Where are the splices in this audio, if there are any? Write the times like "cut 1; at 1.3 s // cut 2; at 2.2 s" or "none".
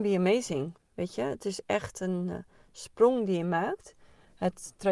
none